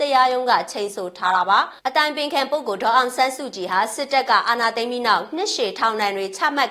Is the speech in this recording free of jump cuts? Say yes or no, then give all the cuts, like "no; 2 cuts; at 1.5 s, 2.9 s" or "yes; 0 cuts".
no; 1 cut; at 1.8 s